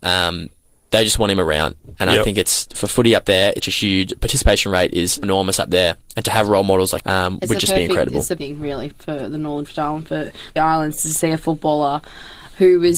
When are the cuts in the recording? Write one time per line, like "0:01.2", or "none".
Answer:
0:03.6
0:05.2
0:07.0
0:08.4
0:08.9
0:09.6
0:10.6